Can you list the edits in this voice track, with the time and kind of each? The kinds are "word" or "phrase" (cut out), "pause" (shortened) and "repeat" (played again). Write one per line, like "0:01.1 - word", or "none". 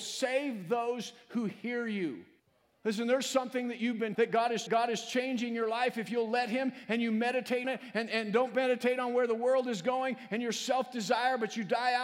0:02.4 - pause
0:04.2 - word
0:04.7 - repeat
0:07.6 - word